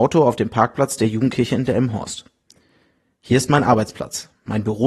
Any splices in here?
no; 0 cuts

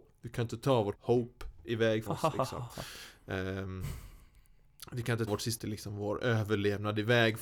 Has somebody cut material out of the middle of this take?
yes; 4 cuts; at 0.9 s, 2.1 s, 5.3 s, 5.6 s

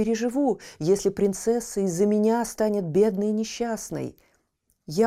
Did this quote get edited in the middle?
no; 0 cuts

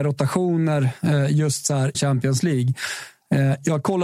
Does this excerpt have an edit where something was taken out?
yes; 1 cut; at 1.9 s

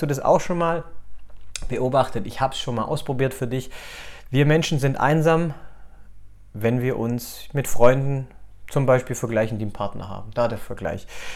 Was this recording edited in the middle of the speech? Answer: no; 0 cuts

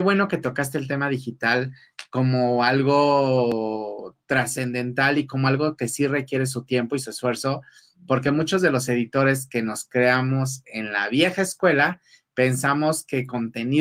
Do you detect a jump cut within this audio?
no; 0 cuts

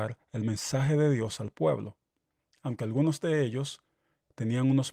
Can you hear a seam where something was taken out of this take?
no; 0 cuts

